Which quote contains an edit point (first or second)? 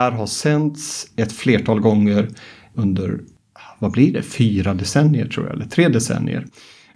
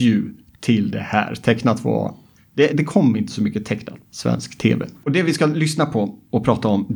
second